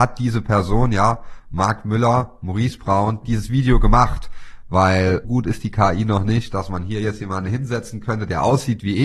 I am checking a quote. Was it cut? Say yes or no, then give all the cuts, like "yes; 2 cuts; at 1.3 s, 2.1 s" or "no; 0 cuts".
yes; 1 cut; at 5.2 s